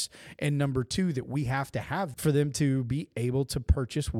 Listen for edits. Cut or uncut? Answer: cut